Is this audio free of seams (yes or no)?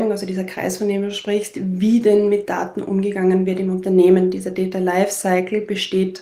yes